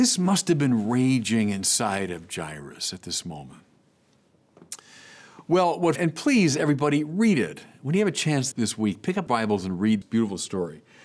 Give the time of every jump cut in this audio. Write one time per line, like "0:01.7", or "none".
0:06.0
0:08.5
0:09.3
0:10.0

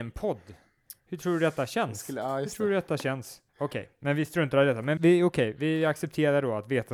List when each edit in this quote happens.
0:03.5
0:05.0

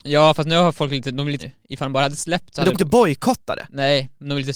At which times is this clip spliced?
0:01.4
0:02.7

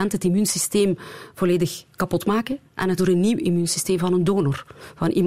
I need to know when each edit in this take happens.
0:01.9
0:03.0

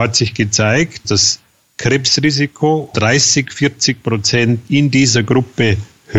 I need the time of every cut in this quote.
0:01.0
0:02.9

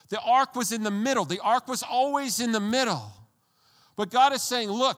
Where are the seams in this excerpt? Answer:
none

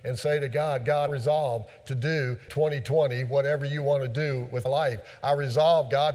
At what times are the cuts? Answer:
0:01.1
0:02.5
0:04.7

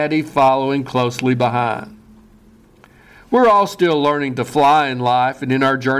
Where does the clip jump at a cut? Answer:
none

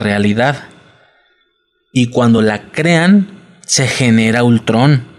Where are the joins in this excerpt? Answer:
none

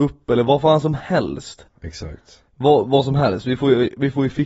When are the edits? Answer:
none

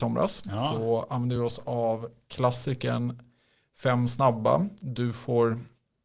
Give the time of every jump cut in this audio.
none

